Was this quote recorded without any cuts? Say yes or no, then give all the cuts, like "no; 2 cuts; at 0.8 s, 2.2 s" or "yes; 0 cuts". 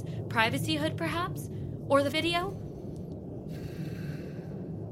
no; 1 cut; at 2.1 s